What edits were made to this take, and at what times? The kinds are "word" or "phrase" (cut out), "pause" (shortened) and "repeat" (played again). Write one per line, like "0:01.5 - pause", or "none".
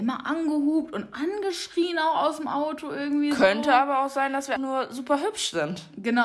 0:04.6 - word